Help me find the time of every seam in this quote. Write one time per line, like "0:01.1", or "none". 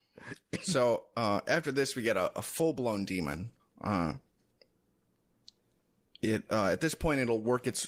0:03.6